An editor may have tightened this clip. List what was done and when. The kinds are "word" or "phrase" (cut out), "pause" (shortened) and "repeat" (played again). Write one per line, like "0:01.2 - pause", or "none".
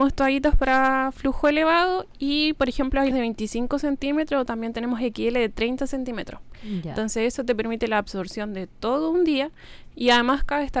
0:03.1 - word